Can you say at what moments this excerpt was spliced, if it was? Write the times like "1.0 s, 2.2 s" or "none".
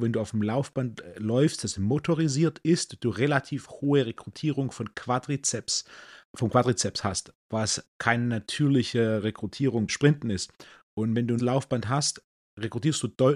6.3 s, 9.9 s, 11.4 s